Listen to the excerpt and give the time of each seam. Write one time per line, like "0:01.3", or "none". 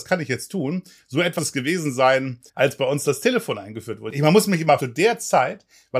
0:01.4
0:02.5
0:04.8

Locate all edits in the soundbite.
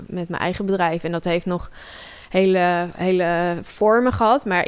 none

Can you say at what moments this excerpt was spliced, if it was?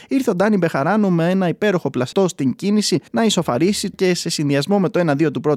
0:02.1
0:03.1
0:03.9

